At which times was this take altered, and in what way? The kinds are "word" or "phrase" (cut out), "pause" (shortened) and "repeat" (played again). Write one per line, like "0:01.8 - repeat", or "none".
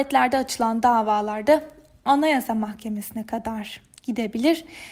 none